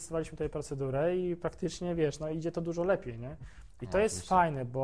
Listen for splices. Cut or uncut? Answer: uncut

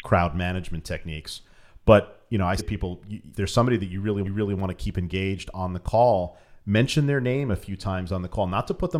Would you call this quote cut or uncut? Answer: cut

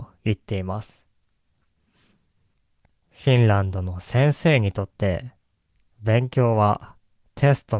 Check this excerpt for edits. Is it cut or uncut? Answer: uncut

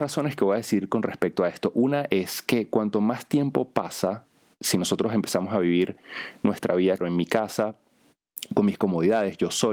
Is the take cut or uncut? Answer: cut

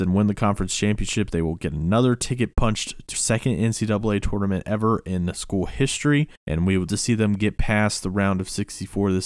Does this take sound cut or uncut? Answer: cut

